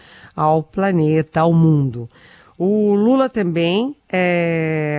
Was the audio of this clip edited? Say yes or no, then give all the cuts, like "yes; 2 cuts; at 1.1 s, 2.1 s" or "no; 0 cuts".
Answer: no; 0 cuts